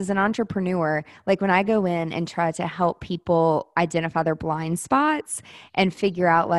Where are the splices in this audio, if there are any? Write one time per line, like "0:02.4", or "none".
none